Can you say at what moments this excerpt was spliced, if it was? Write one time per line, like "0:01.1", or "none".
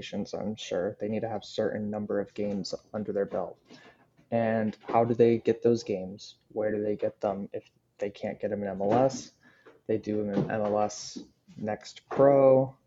none